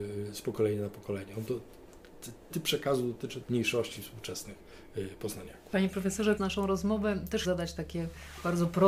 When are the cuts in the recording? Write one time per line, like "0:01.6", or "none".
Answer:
0:02.5
0:03.4
0:06.4
0:07.4

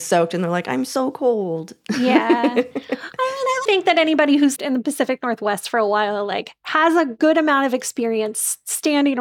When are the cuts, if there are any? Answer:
0:03.6
0:04.6

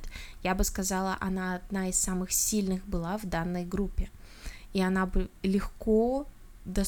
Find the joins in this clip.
none

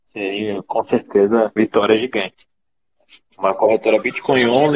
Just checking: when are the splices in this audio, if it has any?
0:01.6

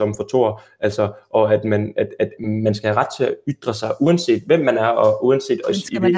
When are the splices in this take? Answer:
0:02.4

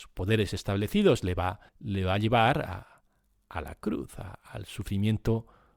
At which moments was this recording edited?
0:01.7

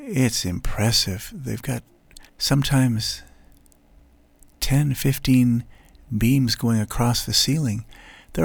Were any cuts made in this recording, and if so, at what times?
0:02.3

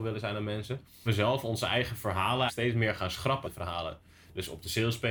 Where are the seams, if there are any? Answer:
0:01.1
0:02.5
0:03.4

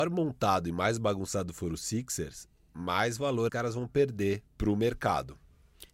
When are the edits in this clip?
0:03.5
0:04.5

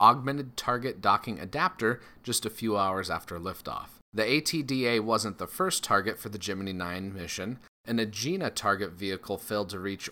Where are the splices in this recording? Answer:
none

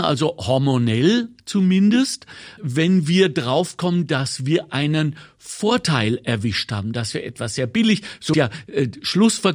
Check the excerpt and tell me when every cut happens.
0:02.6
0:08.3

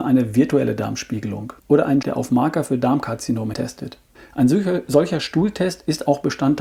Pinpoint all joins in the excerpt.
0:01.6
0:02.0
0:03.5
0:04.1

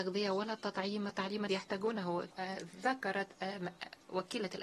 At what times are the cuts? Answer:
0:01.1
0:01.5
0:02.3

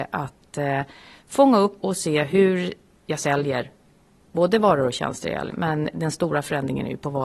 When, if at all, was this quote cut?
0:01.8
0:05.5

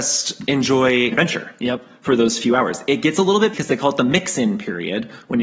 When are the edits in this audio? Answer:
0:01.1
0:03.5

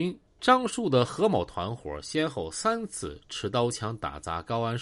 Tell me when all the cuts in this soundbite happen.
none

